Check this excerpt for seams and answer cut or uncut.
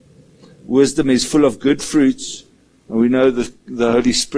cut